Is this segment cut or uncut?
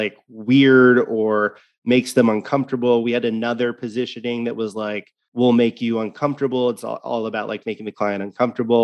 uncut